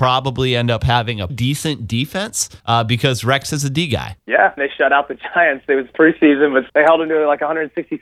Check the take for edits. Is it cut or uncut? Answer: cut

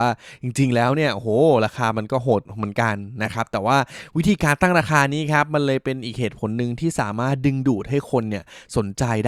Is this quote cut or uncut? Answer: cut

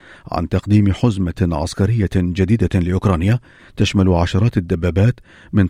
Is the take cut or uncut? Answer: cut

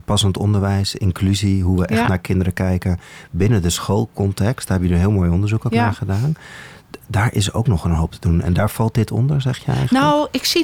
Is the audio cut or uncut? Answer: uncut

